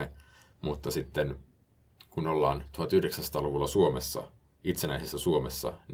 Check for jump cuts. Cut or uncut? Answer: uncut